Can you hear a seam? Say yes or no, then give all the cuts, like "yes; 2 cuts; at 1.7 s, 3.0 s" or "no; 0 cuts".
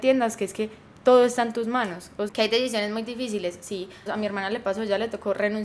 yes; 2 cuts; at 2.3 s, 4.1 s